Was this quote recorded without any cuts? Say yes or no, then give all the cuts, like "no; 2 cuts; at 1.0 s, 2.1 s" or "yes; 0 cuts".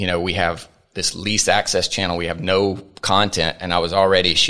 yes; 0 cuts